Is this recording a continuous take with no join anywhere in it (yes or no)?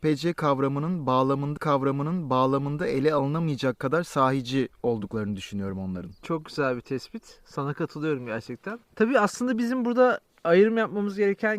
no